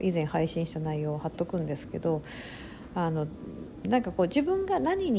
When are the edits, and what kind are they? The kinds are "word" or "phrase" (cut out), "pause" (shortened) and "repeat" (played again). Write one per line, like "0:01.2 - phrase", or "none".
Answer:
0:03.8 - phrase